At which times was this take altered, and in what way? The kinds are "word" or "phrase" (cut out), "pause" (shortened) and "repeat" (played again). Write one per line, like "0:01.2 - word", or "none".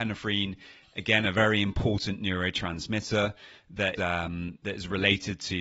0:04.0 - word